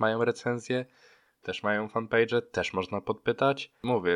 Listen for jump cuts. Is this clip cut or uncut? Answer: uncut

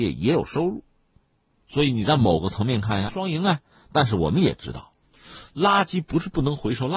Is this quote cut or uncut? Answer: cut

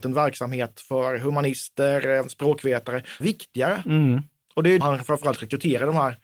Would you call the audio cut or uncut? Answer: cut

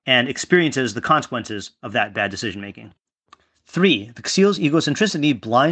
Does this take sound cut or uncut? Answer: uncut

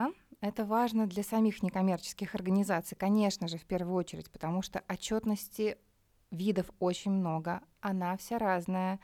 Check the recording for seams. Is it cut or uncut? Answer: uncut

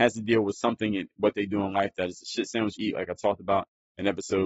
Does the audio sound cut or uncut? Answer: cut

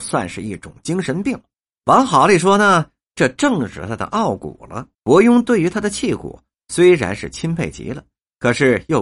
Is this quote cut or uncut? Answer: cut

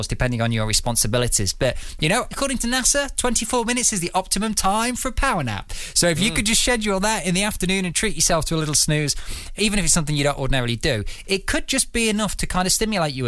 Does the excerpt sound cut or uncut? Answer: cut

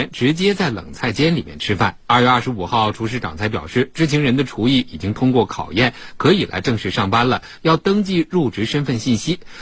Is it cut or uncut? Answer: cut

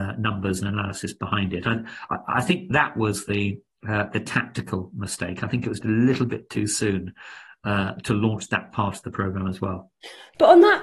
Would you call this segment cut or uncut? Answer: cut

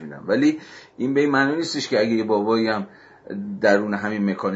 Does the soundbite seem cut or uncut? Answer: uncut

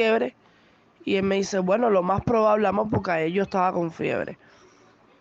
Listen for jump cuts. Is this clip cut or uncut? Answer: uncut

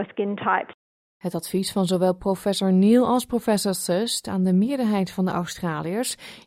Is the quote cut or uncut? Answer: uncut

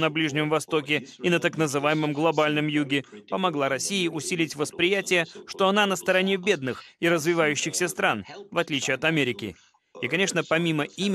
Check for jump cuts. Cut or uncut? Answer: uncut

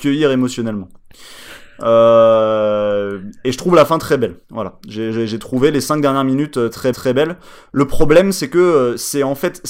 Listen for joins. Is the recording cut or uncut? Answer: cut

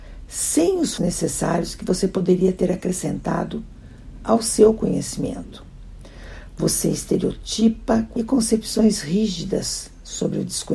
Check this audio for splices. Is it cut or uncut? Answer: cut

